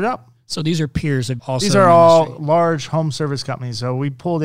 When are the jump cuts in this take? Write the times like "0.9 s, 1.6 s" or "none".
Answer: 1.4 s